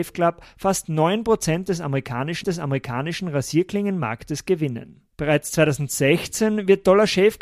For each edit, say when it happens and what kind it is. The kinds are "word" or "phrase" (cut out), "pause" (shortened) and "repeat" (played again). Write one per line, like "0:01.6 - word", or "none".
0:02.4 - repeat
0:05.1 - pause